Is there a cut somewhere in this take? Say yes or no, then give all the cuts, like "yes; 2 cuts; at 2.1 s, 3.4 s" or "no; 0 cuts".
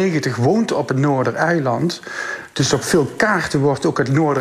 no; 0 cuts